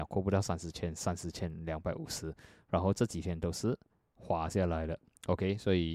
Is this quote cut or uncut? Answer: cut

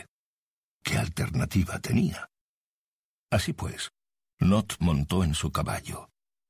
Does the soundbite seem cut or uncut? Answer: uncut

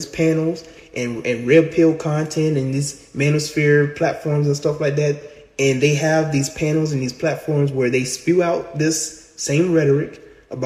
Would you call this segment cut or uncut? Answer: uncut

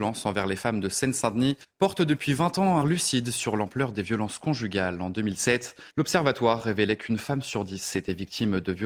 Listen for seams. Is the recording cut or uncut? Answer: cut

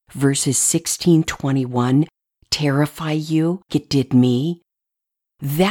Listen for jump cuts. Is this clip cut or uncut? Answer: cut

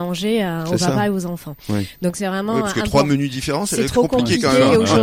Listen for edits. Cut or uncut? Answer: uncut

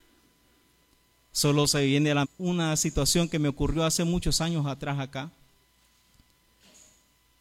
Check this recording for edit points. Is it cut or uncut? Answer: cut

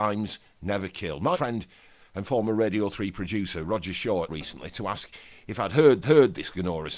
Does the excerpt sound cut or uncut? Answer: cut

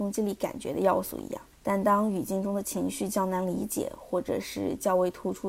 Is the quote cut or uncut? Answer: cut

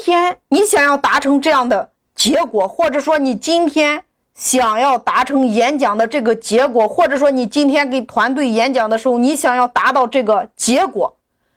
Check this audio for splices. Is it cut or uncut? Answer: uncut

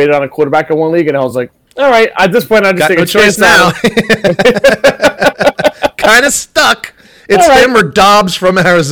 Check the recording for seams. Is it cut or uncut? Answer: uncut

